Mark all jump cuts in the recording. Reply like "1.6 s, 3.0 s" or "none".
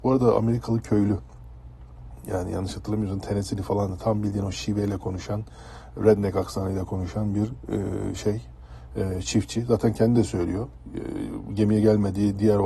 none